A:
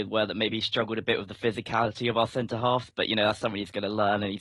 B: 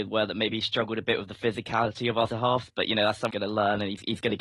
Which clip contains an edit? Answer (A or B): B